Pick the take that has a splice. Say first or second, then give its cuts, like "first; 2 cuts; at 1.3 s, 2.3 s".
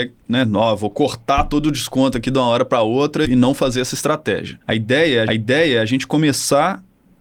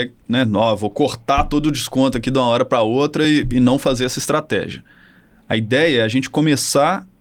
first; 3 cuts; at 3.2 s, 4.6 s, 5.3 s